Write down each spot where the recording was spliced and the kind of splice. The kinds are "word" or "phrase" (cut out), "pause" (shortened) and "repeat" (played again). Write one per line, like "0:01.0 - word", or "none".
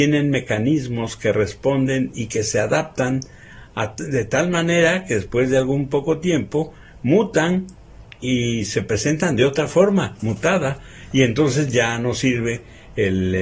none